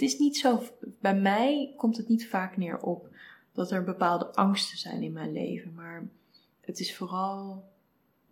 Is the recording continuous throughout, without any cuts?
yes; 0 cuts

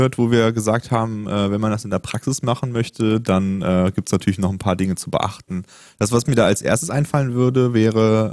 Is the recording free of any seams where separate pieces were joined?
yes; 0 cuts

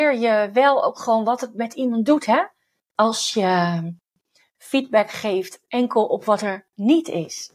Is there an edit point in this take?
no; 0 cuts

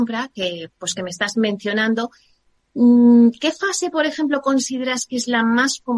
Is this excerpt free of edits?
yes; 0 cuts

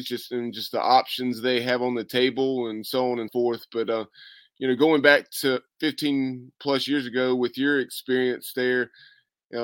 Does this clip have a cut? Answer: yes; 1 cut; at 3.3 s

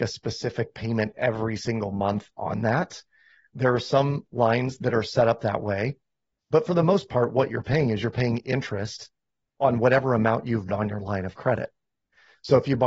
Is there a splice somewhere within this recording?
yes; 1 cut; at 10.7 s

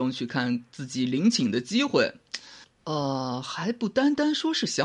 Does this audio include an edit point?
no; 0 cuts

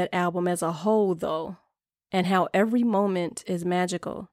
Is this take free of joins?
yes; 0 cuts

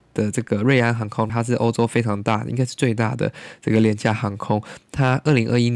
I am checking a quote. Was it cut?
yes; 1 cut; at 1.3 s

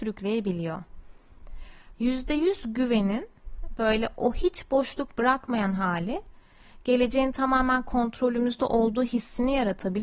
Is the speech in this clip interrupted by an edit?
no; 0 cuts

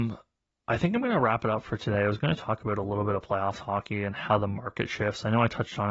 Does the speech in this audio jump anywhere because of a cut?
no; 0 cuts

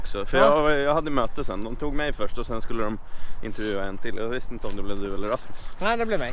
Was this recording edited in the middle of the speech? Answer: no; 0 cuts

